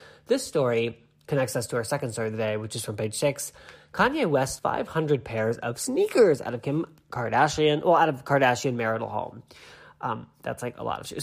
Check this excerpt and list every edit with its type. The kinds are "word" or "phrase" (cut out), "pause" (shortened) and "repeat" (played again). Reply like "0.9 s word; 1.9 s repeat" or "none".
4.6 s word

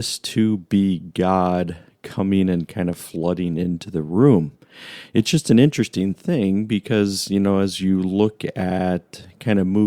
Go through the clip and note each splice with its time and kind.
none

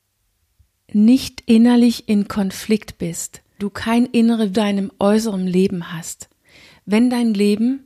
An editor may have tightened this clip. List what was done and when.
3.6 s word; 4.5 s phrase

